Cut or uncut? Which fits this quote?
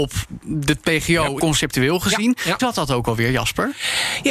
cut